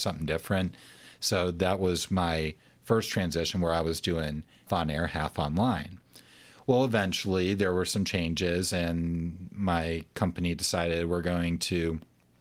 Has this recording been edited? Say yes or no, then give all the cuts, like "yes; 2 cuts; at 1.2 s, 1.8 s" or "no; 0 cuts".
yes; 1 cut; at 4.7 s